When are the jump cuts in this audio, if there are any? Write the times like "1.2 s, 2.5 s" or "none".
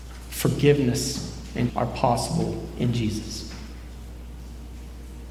1.7 s